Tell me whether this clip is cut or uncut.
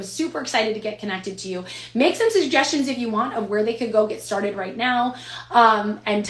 uncut